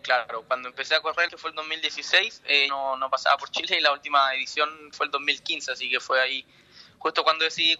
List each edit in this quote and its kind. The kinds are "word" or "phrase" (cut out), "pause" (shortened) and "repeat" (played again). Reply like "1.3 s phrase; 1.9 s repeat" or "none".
1.3 s phrase; 2.7 s word; 4.9 s phrase